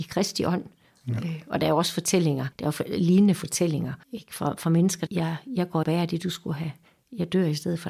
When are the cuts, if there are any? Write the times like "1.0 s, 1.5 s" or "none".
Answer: 2.5 s, 4.0 s, 5.1 s, 5.8 s